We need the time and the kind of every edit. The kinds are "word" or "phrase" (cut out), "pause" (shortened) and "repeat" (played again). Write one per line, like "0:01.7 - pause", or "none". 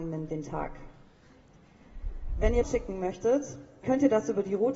0:02.6 - word
0:03.8 - word